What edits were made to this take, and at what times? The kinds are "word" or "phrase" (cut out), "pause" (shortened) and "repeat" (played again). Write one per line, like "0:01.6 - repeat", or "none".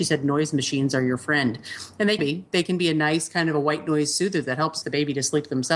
0:02.2 - word
0:04.8 - word